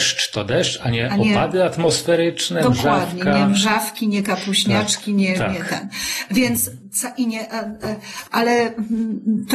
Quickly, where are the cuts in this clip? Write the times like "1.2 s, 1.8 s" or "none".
8.3 s

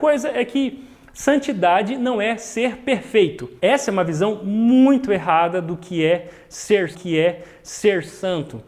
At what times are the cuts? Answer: 3.6 s, 6.9 s

